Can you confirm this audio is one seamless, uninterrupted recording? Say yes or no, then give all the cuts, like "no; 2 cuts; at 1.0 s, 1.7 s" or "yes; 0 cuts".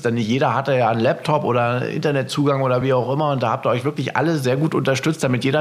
yes; 0 cuts